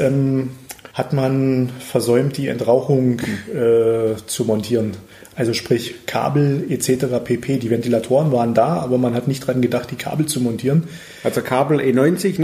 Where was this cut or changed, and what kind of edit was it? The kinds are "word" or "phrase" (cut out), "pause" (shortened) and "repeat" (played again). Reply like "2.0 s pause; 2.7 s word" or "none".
none